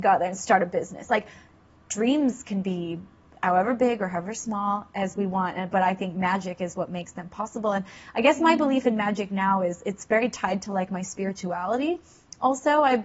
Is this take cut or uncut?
uncut